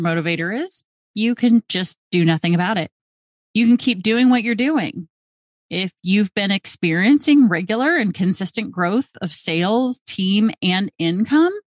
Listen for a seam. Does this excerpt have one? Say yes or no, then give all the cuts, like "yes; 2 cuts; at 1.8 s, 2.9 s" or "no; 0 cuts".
no; 0 cuts